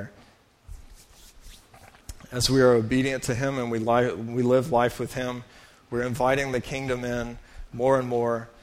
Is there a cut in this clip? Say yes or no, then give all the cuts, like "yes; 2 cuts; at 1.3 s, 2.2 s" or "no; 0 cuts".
no; 0 cuts